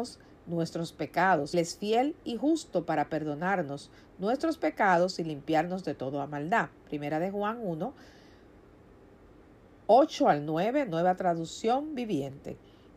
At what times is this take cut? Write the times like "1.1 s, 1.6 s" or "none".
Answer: 1.5 s